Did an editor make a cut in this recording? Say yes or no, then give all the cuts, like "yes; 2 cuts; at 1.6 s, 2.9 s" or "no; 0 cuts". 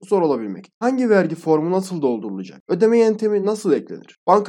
no; 0 cuts